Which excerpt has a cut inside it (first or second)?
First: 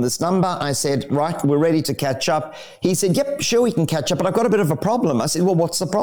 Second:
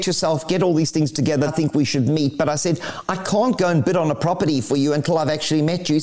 second